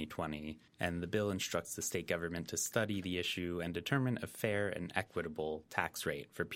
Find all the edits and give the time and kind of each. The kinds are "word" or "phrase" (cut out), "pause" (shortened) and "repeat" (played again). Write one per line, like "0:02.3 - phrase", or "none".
none